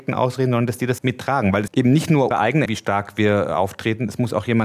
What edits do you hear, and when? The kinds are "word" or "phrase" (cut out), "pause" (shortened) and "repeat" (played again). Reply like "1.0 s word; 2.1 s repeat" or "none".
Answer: 1.0 s phrase; 1.7 s phrase; 2.3 s word; 2.7 s word